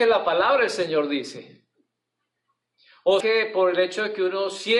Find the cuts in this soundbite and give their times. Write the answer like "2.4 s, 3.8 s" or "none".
3.2 s